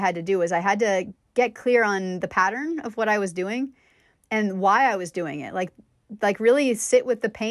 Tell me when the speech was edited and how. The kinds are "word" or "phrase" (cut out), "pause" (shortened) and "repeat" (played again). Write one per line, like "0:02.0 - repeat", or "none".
none